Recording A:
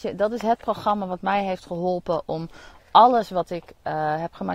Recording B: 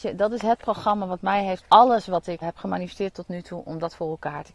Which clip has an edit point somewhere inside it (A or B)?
B